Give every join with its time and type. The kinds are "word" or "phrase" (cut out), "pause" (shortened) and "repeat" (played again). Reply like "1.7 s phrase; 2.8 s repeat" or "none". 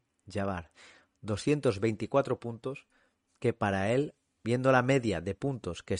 none